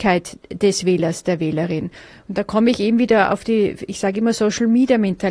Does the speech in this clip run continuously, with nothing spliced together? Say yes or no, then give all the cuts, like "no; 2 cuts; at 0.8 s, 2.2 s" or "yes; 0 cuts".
yes; 0 cuts